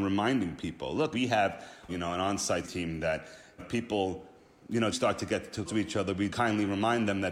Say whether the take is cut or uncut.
cut